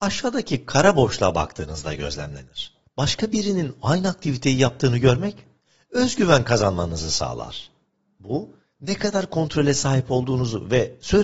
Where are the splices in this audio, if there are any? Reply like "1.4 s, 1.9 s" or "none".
2.8 s